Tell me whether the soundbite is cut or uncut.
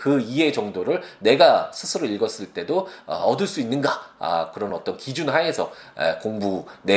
uncut